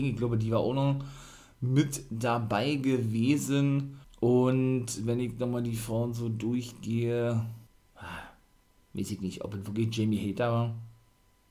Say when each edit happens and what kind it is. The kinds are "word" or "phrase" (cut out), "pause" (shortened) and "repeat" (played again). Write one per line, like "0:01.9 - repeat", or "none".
0:04.0 - pause
0:07.7 - pause